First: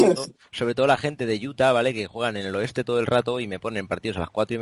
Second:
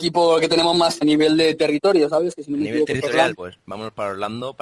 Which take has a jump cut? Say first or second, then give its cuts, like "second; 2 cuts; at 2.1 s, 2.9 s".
second; 2 cuts; at 1.0 s, 3.3 s